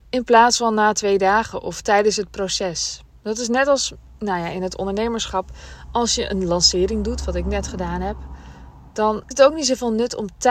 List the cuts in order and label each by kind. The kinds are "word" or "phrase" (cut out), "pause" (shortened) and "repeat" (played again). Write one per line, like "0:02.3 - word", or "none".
0:09.3 - word